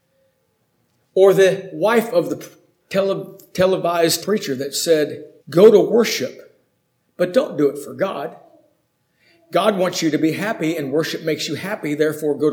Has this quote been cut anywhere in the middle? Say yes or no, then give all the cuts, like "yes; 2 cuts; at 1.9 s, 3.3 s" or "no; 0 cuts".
yes; 2 cuts; at 4.2 s, 5.4 s